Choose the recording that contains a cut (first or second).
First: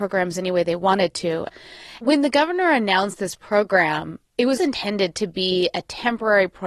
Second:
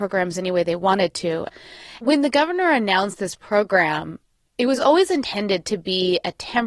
first